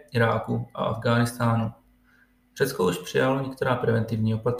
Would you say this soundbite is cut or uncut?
uncut